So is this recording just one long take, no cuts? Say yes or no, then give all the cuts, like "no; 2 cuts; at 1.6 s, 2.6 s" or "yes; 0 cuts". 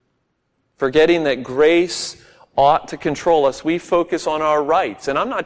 yes; 0 cuts